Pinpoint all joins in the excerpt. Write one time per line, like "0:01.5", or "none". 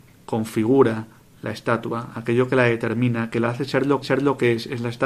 0:04.0